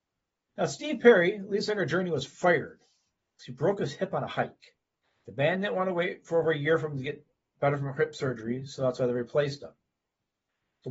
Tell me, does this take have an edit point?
yes; 1 cut; at 5.0 s

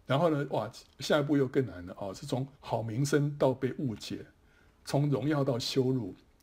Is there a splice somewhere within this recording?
yes; 1 cut; at 2.5 s

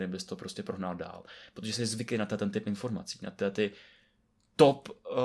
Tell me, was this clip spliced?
no; 0 cuts

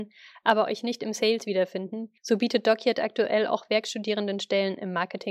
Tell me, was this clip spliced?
yes; 1 cut; at 2.2 s

